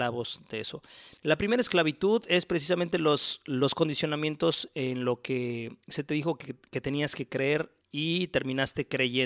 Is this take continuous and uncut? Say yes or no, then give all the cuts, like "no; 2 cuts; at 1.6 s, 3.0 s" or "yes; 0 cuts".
no; 3 cuts; at 1.2 s, 5.8 s, 7.8 s